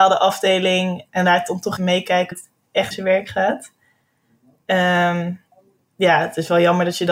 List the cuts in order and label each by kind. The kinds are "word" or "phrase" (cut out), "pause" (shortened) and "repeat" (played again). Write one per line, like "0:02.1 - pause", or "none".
0:01.1 - word
0:01.8 - word
0:02.3 - word
0:02.9 - word
0:05.5 - pause